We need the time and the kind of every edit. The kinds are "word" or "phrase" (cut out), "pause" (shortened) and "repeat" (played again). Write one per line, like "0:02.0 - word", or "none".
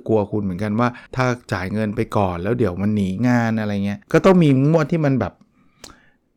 0:01.1 - pause
0:04.0 - pause